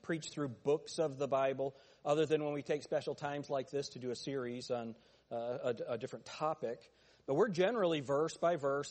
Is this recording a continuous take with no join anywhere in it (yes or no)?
yes